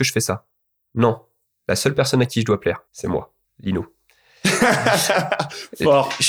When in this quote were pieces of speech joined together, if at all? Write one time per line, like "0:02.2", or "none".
0:01.5
0:02.9
0:03.4

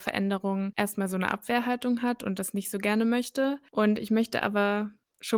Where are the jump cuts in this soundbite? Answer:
none

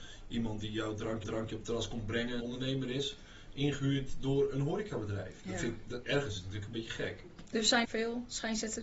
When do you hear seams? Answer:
0:01.2
0:02.4
0:07.8

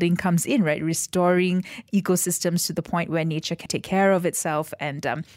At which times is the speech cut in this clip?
0:03.7

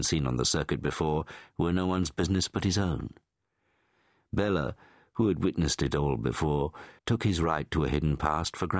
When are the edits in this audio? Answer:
0:07.0

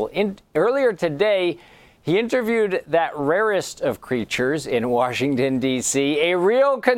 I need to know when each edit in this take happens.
none

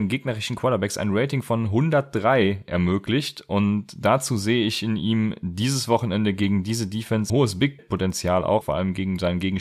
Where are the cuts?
0:07.3
0:07.8
0:08.6

